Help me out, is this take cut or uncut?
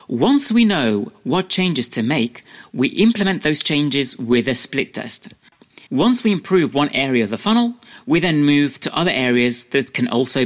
cut